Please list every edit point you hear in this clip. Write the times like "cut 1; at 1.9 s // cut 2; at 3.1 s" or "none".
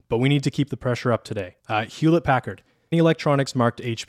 cut 1; at 1.6 s // cut 2; at 2.9 s